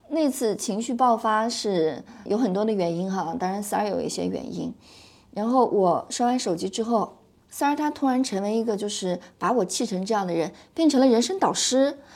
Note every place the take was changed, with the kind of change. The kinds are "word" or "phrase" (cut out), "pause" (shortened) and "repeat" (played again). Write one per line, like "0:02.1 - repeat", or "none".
0:02.3 - word